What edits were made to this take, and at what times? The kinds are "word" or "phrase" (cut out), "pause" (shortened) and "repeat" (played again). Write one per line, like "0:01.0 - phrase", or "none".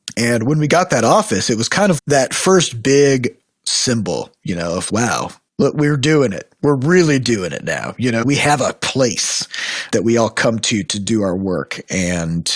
0:02.0 - word
0:04.9 - word
0:08.2 - word
0:09.9 - word